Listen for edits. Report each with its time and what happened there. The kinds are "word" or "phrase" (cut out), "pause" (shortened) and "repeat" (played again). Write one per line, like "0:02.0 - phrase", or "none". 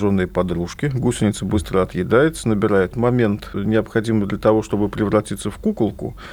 0:02.9 - phrase